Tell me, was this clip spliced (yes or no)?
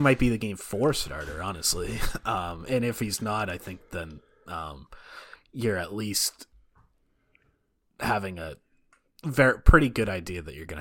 no